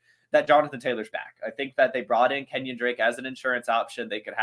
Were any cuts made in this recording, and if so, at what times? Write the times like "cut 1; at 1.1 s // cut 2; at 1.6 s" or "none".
cut 1; at 1.1 s